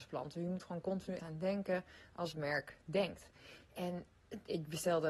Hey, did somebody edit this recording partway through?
yes; 2 cuts; at 1.2 s, 2.3 s

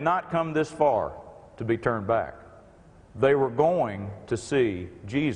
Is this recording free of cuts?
yes; 0 cuts

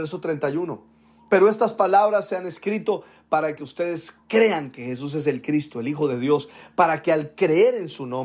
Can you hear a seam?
no; 0 cuts

